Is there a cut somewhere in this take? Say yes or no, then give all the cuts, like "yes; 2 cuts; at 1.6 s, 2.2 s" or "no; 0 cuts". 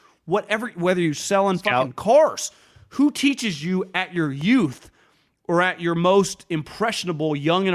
no; 0 cuts